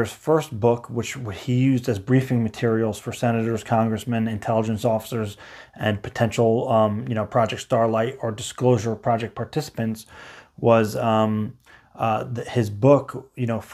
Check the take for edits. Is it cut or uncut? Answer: uncut